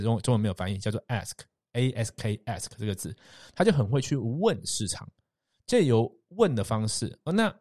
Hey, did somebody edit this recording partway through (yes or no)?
no